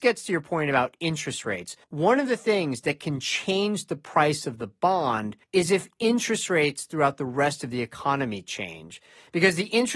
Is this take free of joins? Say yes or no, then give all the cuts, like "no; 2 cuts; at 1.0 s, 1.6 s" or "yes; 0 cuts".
no; 2 cuts; at 1.8 s, 5.4 s